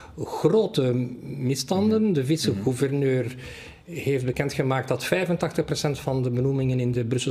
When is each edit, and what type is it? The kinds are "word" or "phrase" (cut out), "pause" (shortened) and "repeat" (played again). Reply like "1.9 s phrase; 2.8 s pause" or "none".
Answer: none